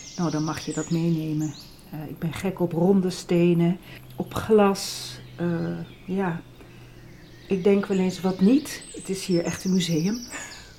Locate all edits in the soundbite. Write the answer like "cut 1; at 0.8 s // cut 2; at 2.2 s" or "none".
none